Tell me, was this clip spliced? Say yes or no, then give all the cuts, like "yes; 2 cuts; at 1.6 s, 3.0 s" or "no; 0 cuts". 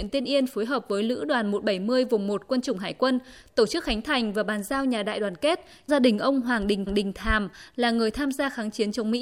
yes; 2 cuts; at 5.9 s, 6.9 s